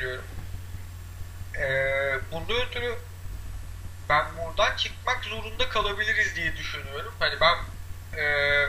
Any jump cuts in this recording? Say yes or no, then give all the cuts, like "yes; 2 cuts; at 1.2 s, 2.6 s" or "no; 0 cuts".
no; 0 cuts